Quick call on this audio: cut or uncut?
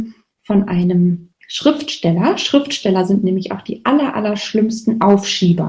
cut